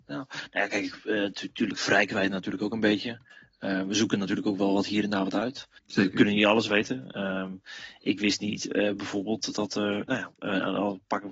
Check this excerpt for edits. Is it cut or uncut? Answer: cut